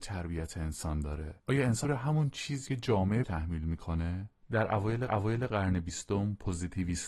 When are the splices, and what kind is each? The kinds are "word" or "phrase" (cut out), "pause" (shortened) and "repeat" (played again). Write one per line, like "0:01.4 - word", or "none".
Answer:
0:01.4 - pause
0:01.8 - word
0:02.7 - word
0:03.2 - word
0:05.1 - repeat